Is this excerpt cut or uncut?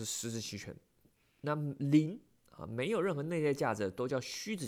uncut